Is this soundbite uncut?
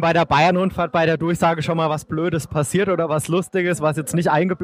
yes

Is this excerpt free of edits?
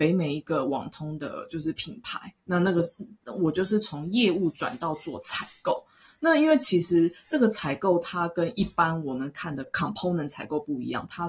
yes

